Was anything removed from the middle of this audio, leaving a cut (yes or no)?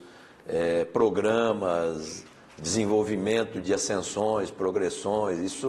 yes